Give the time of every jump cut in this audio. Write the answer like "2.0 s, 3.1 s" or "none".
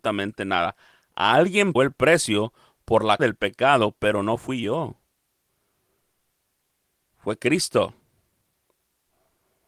1.8 s, 3.2 s